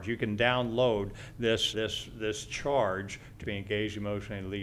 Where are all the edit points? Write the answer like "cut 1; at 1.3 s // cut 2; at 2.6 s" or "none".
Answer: cut 1; at 1.7 s // cut 2; at 3.4 s